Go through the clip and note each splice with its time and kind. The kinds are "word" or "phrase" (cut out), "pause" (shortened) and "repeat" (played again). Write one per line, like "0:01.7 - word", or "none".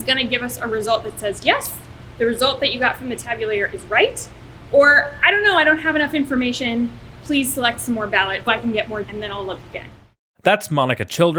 0:08.5 - word
0:09.0 - word